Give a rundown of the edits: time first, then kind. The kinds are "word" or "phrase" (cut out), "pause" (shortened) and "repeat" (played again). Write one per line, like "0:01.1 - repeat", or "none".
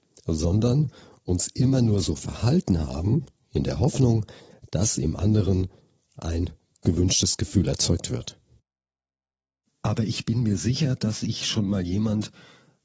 none